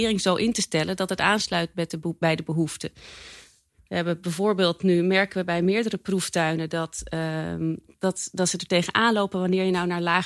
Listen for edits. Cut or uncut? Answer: uncut